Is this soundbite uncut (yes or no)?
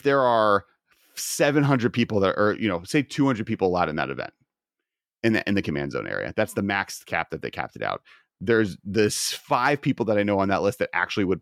yes